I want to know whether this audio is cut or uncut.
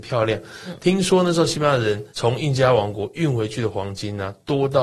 cut